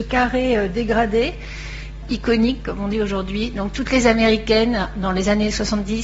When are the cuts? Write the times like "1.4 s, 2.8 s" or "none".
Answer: 2.0 s